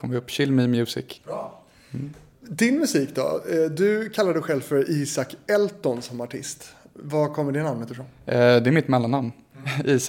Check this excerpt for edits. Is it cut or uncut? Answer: cut